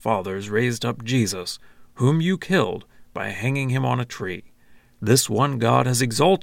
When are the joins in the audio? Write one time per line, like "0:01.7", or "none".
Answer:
none